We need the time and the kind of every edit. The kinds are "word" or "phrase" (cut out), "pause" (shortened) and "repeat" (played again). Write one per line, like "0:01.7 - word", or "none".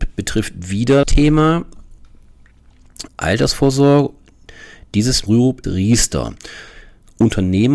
0:01.0 - word
0:03.1 - word
0:05.3 - phrase
0:05.6 - word